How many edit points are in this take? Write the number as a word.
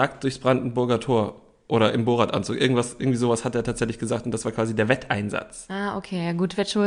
zero